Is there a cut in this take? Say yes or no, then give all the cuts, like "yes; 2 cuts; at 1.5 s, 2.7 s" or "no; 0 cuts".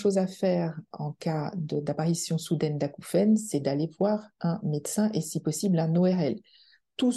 no; 0 cuts